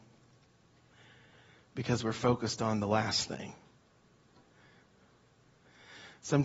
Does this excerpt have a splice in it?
no; 0 cuts

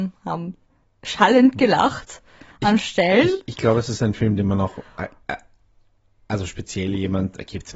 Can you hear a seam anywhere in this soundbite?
no; 0 cuts

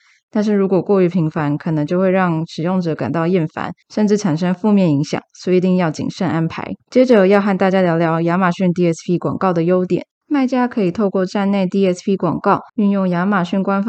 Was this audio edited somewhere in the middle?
yes; 3 cuts; at 3.8 s, 6.8 s, 12.7 s

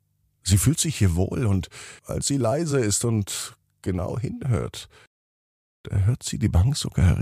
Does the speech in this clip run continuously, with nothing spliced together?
yes; 0 cuts

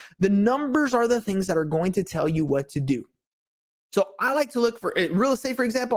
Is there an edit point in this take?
no; 0 cuts

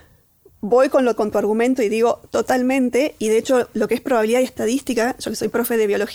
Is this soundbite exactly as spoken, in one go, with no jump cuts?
no; 1 cut; at 1.2 s

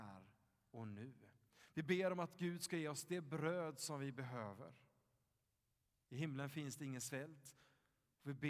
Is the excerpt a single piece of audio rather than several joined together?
yes; 0 cuts

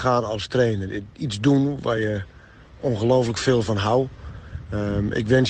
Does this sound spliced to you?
no; 0 cuts

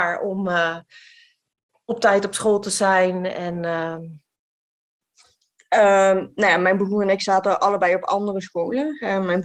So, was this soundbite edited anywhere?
no; 0 cuts

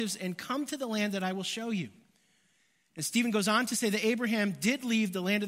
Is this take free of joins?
yes; 0 cuts

